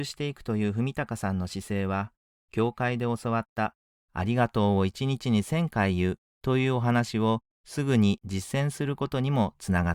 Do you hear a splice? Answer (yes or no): no